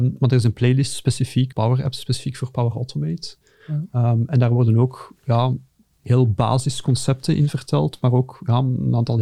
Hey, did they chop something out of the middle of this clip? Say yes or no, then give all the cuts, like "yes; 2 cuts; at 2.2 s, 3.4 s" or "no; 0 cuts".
yes; 1 cut; at 1.5 s